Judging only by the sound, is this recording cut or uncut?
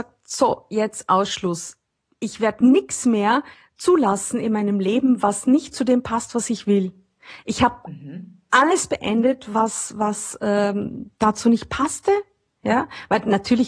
cut